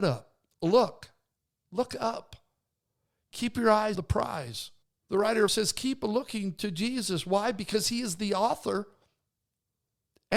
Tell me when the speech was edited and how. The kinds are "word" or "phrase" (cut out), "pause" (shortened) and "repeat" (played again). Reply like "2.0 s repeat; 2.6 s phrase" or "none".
1.4 s pause; 3.9 s word; 4.8 s pause; 5.5 s word